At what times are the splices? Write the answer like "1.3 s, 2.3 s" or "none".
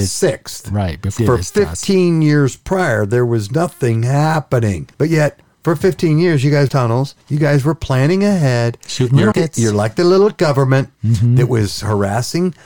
1.2 s, 4.9 s, 6.7 s, 7.2 s, 9.3 s, 10.9 s